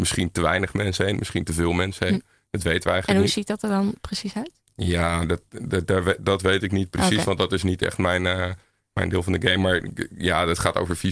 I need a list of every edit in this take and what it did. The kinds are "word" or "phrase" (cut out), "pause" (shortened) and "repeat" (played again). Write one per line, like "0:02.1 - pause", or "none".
none